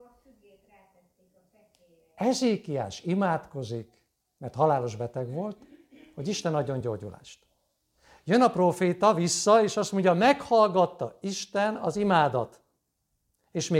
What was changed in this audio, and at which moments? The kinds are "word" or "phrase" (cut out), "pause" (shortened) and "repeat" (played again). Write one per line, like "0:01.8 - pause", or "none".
none